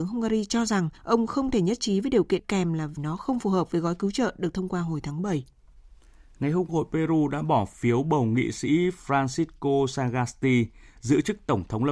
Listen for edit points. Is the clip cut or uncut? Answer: cut